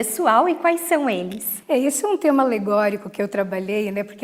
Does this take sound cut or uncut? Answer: uncut